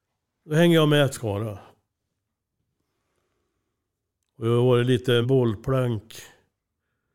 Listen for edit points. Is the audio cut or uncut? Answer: cut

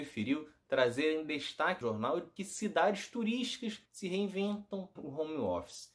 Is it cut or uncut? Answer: cut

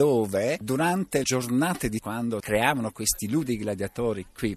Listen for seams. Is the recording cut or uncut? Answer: cut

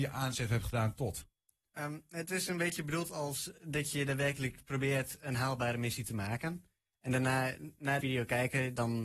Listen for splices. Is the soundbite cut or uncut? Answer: cut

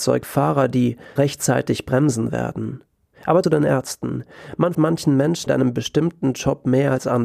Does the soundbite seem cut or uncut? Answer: cut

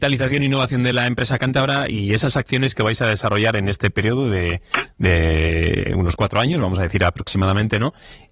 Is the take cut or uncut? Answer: uncut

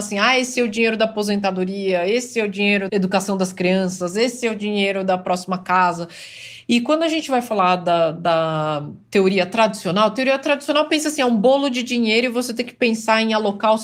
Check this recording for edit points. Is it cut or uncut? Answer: cut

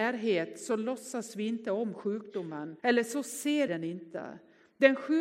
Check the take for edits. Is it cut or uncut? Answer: cut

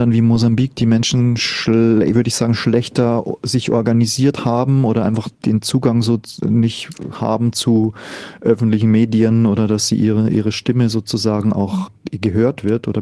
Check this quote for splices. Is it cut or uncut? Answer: cut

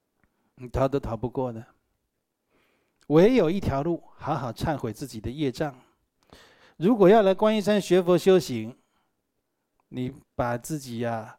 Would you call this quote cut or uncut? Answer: uncut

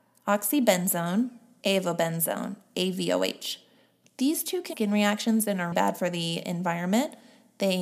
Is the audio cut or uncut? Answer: cut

